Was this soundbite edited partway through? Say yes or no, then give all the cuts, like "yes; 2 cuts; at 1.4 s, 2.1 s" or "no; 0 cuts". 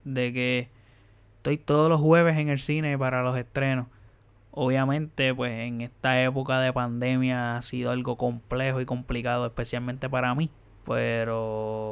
no; 0 cuts